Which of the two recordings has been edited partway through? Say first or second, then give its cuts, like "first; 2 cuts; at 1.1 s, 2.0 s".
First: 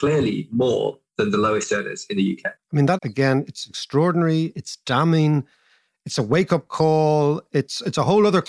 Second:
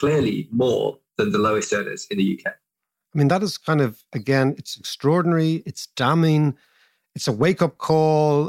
first; 2 cuts; at 2.6 s, 3.0 s